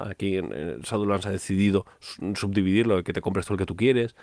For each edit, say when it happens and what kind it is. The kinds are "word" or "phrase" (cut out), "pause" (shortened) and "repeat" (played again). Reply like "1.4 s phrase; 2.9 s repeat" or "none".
1.9 s pause